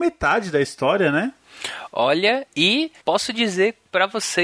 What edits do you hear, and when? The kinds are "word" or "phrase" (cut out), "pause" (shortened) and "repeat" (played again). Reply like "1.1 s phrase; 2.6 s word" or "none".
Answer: 3.0 s pause